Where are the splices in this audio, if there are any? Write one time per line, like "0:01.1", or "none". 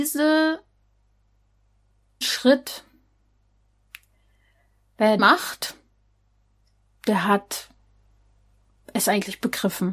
0:02.2
0:05.2